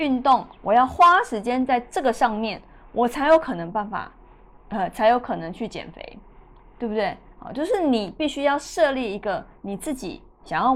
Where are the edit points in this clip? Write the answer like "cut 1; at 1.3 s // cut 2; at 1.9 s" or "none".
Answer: none